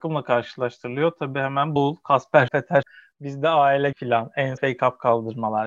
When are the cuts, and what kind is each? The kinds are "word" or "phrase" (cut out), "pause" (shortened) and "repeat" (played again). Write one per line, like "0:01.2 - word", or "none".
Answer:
0:01.8 - word
0:02.5 - word
0:02.8 - word
0:03.9 - word
0:04.6 - word